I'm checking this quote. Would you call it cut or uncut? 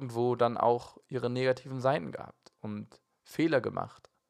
uncut